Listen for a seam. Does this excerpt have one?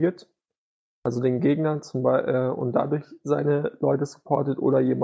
no; 0 cuts

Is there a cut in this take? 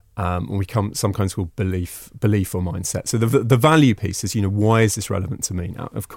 no; 0 cuts

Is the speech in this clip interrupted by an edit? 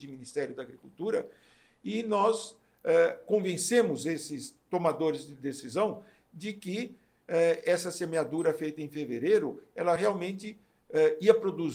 no; 0 cuts

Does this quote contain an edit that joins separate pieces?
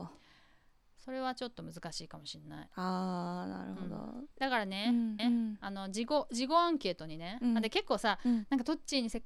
yes; 2 cuts; at 4.3 s, 5.2 s

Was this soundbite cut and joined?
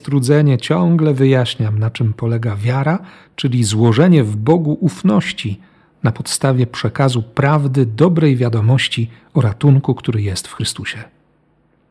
no; 0 cuts

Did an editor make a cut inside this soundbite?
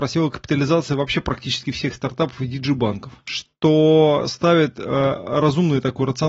no; 0 cuts

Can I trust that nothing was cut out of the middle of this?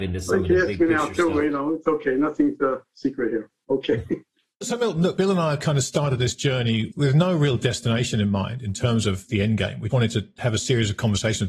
no; 2 cuts; at 6.9 s, 9.9 s

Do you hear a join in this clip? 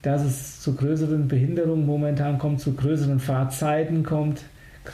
no; 0 cuts

